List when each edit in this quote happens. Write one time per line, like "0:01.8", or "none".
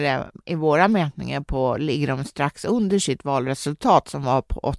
none